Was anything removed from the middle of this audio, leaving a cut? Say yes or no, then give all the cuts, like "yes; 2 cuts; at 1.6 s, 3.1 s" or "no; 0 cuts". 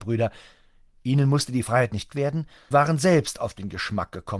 yes; 2 cuts; at 2.1 s, 2.7 s